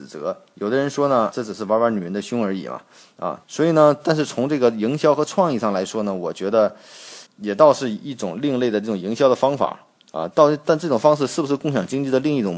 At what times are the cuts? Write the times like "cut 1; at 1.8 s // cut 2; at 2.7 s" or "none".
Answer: cut 1; at 1.3 s // cut 2; at 3.4 s // cut 3; at 7.3 s

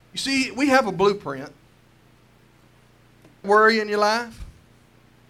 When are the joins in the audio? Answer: cut 1; at 3.4 s

